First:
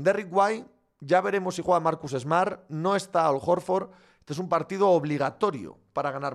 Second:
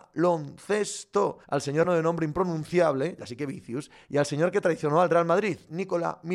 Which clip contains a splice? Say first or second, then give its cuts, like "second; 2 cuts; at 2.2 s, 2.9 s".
second; 2 cuts; at 1.4 s, 1.8 s